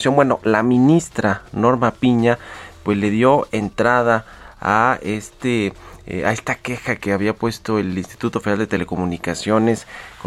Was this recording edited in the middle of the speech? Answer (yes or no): no